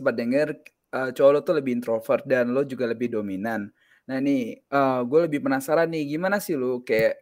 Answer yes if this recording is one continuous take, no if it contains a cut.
yes